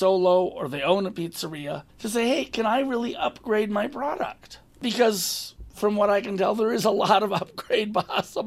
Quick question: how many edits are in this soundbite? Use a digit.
1